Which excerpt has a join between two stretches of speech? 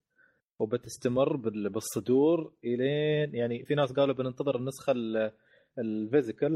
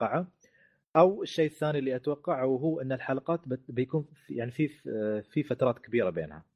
first; 1 cut; at 3.7 s

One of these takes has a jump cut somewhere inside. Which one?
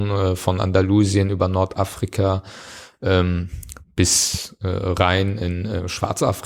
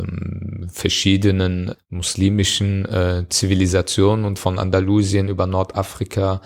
second; 1 cut; at 4.4 s

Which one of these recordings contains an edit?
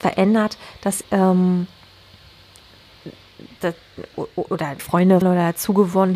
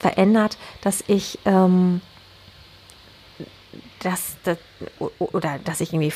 first; 4 cuts; at 1.0 s, 3.6 s, 4.8 s, 5.2 s

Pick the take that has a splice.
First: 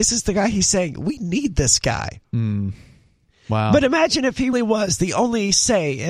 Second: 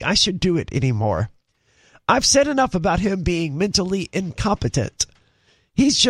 first; 1 cut; at 4.5 s

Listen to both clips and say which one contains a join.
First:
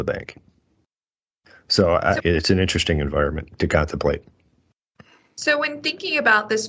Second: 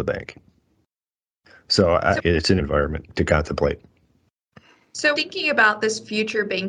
second; 2 cuts; at 2.6 s, 5.1 s

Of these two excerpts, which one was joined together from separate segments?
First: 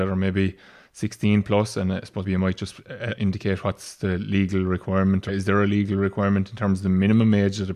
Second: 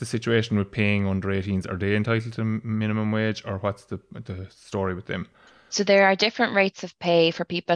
first; 3 cuts; at 2.2 s, 3.2 s, 5.3 s

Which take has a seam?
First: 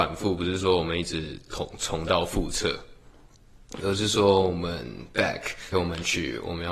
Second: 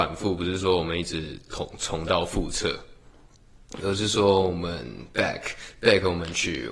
first; 1 cut; at 5.7 s

